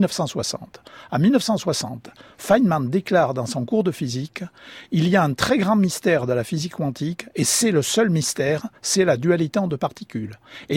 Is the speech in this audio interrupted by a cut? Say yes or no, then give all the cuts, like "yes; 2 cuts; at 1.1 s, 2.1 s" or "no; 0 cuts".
no; 0 cuts